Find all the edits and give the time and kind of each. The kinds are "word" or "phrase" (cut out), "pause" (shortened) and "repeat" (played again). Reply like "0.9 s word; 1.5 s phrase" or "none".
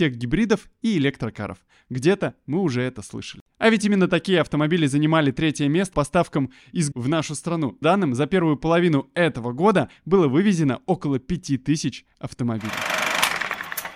5.9 s word; 6.9 s word; 7.8 s word